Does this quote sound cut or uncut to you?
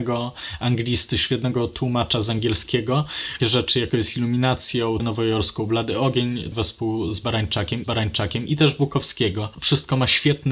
cut